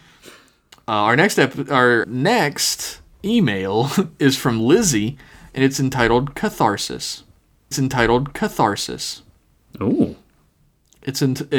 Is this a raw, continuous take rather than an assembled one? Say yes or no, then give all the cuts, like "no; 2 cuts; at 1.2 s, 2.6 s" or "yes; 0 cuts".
no; 2 cuts; at 2.0 s, 7.7 s